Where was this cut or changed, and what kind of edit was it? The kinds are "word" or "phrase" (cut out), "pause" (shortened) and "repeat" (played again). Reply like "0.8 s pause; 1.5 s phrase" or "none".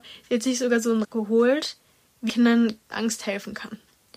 1.0 s word; 2.3 s word; 2.9 s word